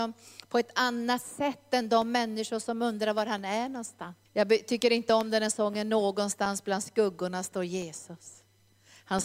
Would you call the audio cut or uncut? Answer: cut